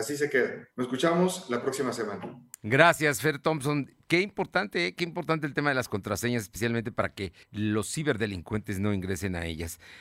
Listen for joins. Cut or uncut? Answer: cut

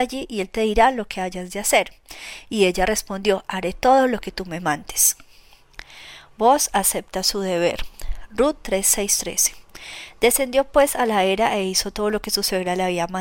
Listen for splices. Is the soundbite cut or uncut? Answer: uncut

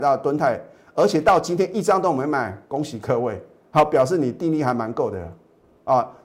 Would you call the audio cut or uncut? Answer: uncut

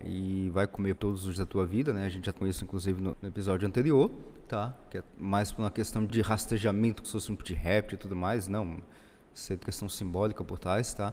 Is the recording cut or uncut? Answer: cut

